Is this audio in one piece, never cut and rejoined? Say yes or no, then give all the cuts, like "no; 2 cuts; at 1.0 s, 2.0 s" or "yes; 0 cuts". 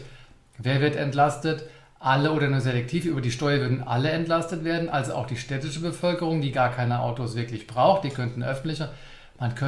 yes; 0 cuts